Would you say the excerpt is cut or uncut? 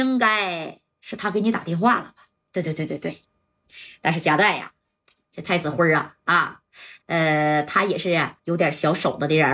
cut